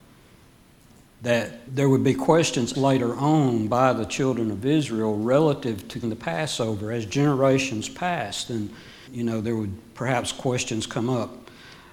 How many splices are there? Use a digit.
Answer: 4